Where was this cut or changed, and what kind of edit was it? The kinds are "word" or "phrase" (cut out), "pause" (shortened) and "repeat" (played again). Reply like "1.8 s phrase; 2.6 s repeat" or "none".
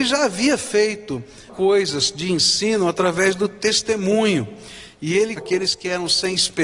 1.5 s word; 5.4 s word